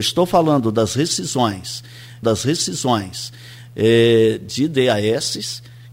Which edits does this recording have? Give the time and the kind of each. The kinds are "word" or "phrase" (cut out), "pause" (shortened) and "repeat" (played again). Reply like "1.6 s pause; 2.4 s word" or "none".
2.2 s repeat